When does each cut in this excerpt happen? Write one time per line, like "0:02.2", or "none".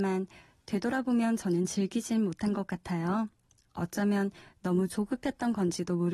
none